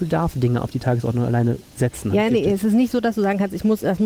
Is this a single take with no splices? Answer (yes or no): no